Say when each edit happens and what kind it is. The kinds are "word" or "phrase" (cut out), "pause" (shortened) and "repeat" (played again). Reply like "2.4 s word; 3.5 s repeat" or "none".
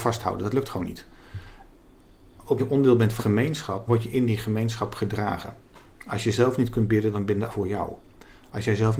2.6 s word; 3.2 s word; 3.9 s word; 7.5 s word